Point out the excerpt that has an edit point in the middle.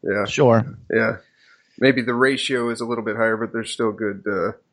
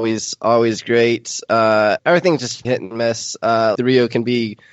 second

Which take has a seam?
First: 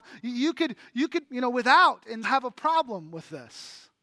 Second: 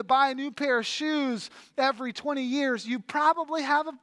first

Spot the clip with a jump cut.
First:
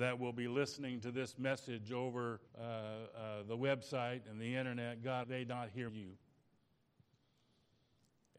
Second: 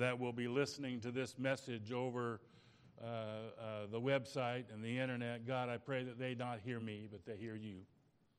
first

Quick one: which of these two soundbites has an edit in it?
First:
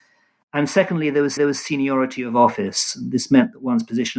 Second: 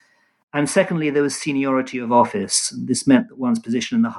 first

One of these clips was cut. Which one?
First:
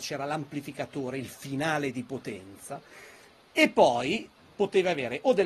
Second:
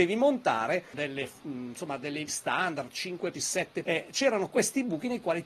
second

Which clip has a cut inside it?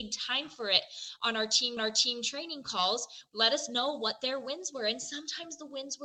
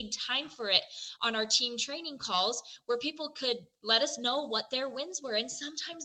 first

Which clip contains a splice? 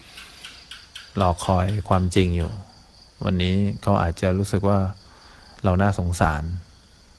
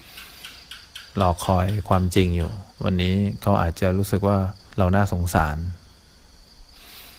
second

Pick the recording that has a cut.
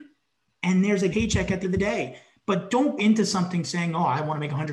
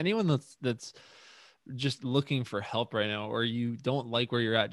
first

